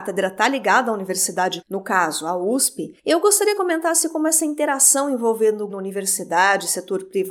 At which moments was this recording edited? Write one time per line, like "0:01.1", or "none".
0:01.6
0:03.6
0:05.7